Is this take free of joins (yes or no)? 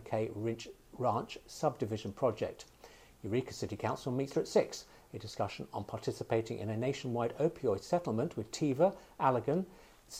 no